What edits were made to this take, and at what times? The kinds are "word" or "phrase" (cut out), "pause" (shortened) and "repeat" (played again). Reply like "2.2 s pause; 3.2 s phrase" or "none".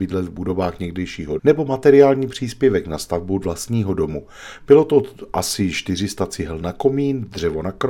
1.4 s word